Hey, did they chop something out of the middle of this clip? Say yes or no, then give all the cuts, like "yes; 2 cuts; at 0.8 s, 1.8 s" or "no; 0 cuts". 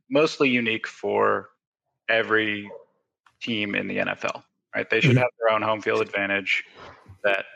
no; 0 cuts